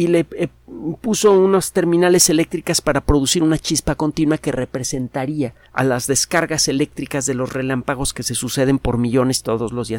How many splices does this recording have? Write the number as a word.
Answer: one